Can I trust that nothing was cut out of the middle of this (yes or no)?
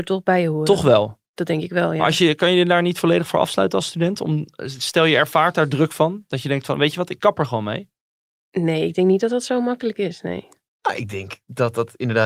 no